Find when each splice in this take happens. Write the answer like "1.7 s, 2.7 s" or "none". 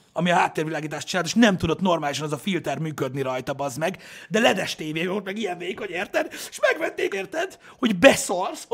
7.1 s

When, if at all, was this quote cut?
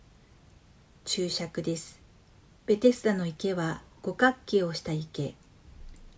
2.4 s

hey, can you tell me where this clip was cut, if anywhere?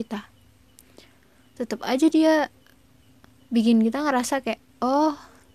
none

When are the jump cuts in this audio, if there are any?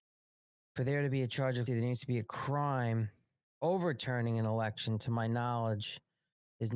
1.7 s

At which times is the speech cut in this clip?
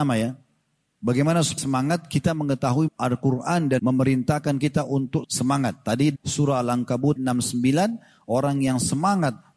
1.6 s, 2.9 s, 3.8 s, 5.2 s, 6.2 s, 7.2 s

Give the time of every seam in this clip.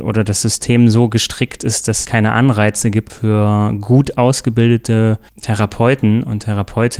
2.0 s, 5.3 s

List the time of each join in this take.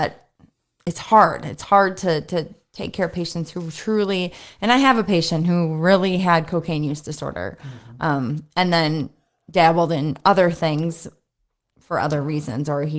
none

